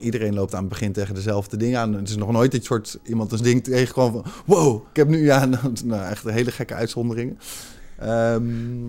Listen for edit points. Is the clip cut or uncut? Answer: cut